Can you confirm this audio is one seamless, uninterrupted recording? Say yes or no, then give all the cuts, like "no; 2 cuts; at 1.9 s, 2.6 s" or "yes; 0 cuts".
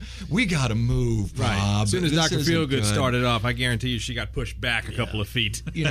yes; 0 cuts